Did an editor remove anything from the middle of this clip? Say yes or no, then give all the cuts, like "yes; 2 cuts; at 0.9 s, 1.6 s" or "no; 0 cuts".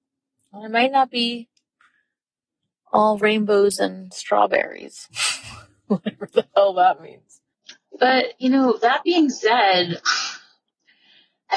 no; 0 cuts